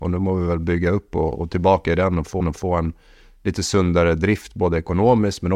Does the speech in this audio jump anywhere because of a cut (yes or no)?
yes